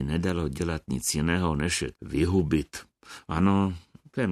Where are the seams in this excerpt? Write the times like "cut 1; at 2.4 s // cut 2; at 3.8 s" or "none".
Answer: cut 1; at 1.9 s